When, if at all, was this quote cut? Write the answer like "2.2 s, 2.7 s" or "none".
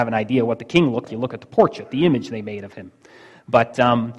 1.1 s